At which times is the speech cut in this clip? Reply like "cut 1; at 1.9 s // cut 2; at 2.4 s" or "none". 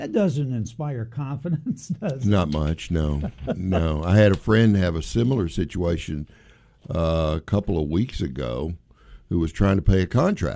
none